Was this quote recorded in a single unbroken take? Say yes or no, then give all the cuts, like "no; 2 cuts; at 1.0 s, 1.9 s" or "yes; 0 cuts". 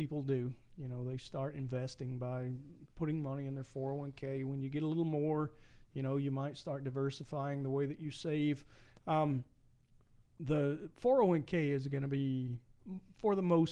yes; 0 cuts